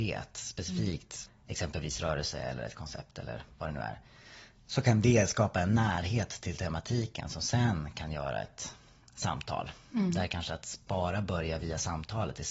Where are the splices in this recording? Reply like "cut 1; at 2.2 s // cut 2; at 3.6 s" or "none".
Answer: cut 1; at 1.3 s